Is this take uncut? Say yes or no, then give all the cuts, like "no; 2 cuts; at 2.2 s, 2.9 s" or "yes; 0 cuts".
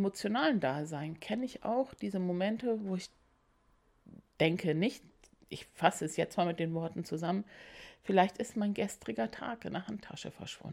yes; 0 cuts